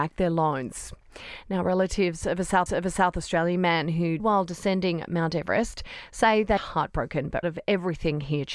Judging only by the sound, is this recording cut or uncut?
cut